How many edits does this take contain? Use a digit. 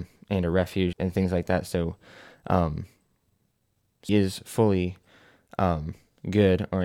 2